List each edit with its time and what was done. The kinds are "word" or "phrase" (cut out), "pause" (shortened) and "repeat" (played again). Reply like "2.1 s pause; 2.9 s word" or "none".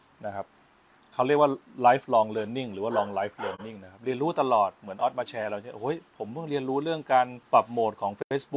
7.4 s pause